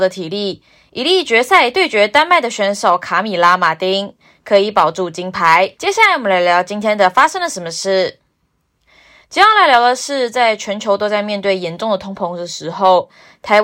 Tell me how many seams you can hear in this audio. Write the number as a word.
one